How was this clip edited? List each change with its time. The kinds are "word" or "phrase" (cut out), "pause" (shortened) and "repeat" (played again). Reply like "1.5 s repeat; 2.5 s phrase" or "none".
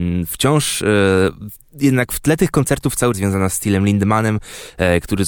3.1 s phrase